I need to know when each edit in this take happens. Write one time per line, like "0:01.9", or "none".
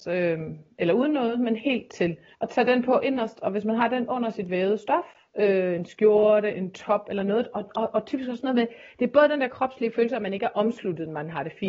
0:02.3